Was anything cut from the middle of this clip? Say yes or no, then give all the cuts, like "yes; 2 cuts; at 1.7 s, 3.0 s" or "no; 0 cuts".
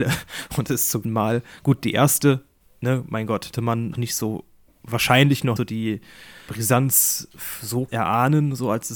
yes; 7 cuts; at 1.0 s, 2.6 s, 3.5 s, 3.9 s, 5.6 s, 6.5 s, 7.9 s